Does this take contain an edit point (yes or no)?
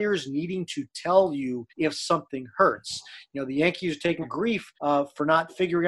yes